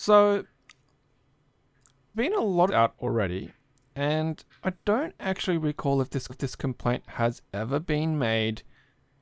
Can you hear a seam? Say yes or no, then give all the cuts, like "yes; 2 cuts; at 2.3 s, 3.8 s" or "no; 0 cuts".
yes; 4 cuts; at 2.1 s, 2.7 s, 4.5 s, 6.3 s